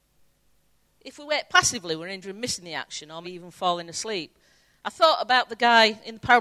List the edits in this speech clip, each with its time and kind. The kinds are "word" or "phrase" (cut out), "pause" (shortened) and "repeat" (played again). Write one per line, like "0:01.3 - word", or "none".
0:02.2 - word
0:03.2 - word